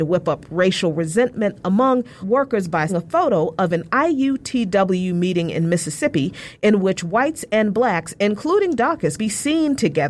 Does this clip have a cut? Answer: yes; 3 cuts; at 2.2 s, 2.9 s, 9.2 s

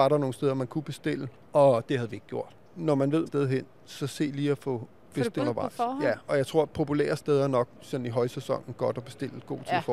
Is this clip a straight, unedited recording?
no; 2 cuts; at 3.3 s, 5.4 s

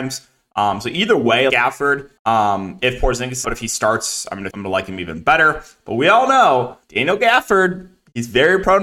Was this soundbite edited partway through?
yes; 5 cuts; at 1.5 s, 2.2 s, 3.4 s, 4.5 s, 6.8 s

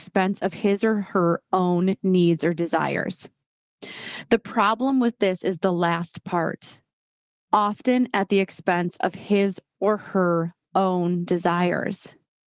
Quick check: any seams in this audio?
no; 0 cuts

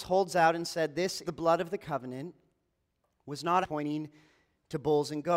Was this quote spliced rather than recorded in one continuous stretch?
yes; 2 cuts; at 1.2 s, 3.6 s

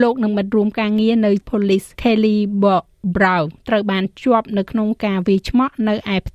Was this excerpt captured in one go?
no; 2 cuts; at 1.4 s, 1.9 s

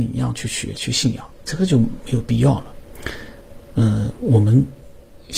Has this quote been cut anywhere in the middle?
yes; 1 cut; at 1.3 s

